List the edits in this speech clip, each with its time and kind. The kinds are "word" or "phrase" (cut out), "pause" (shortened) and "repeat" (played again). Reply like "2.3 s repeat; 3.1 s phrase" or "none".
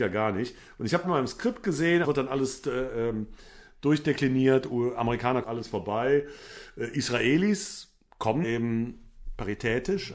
1.0 s word; 2.0 s word; 5.4 s phrase; 8.4 s phrase